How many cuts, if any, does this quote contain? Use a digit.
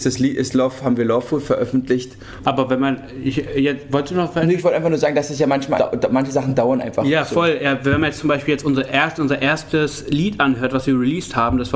1